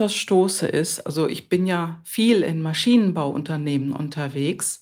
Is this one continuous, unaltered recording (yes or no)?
yes